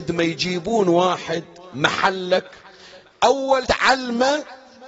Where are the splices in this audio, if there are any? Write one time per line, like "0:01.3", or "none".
0:03.6